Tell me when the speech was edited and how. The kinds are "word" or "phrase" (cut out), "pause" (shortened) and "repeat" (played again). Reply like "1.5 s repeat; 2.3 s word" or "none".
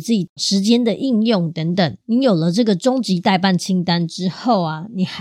2.0 s pause